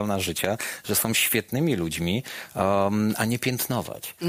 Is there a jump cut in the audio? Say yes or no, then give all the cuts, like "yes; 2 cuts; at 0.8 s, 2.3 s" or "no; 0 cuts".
no; 0 cuts